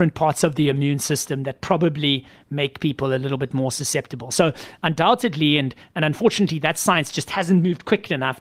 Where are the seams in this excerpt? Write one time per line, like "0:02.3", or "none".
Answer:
none